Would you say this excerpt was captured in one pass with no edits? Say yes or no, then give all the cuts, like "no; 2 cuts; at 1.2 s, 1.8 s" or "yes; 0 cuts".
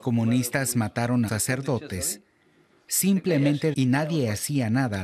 no; 2 cuts; at 1.3 s, 3.7 s